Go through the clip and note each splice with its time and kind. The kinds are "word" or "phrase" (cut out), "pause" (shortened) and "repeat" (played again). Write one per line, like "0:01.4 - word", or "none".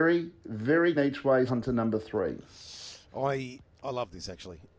0:00.9 - word
0:01.5 - word
0:03.6 - word